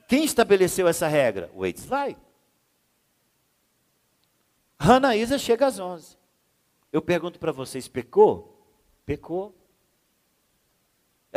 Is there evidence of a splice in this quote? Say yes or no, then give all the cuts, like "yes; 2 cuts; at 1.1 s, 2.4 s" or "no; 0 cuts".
no; 0 cuts